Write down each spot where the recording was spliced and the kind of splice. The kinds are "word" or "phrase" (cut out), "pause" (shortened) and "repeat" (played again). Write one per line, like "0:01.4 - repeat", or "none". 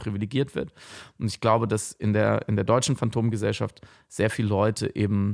none